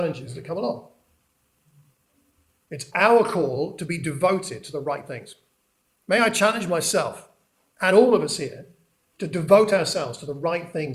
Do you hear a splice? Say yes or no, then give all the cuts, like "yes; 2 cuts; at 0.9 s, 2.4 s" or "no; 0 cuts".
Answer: no; 0 cuts